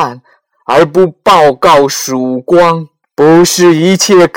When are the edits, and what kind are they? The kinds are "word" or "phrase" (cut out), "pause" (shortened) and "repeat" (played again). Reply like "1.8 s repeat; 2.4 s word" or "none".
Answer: 3.0 s pause